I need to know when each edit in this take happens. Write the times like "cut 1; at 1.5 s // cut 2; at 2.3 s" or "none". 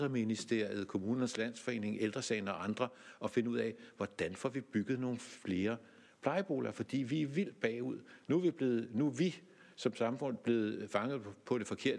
none